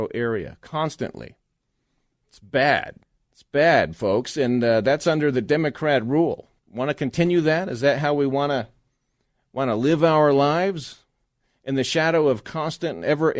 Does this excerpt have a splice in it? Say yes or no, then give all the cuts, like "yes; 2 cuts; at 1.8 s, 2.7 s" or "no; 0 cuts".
yes; 2 cuts; at 3.0 s, 6.6 s